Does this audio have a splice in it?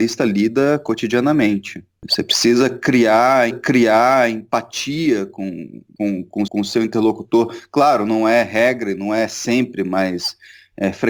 yes; 2 cuts; at 3.5 s, 6.5 s

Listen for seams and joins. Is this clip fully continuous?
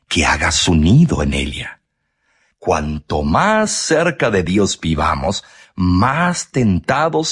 yes; 0 cuts

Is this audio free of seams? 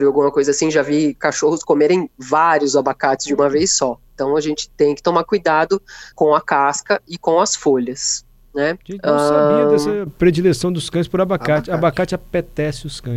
no; 2 cuts; at 6.1 s, 8.8 s

